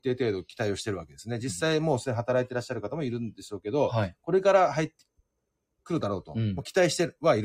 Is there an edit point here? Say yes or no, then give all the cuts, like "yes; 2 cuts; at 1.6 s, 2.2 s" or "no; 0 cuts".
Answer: no; 0 cuts